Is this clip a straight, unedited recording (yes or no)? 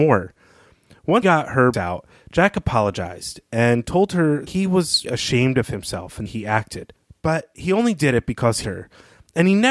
no